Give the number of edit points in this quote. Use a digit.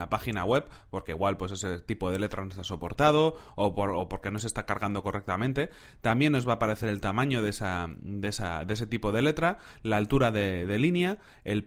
0